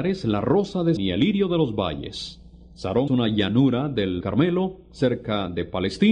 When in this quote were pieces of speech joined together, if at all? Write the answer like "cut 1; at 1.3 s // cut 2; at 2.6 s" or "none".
cut 1; at 1.0 s // cut 2; at 3.1 s // cut 3; at 4.2 s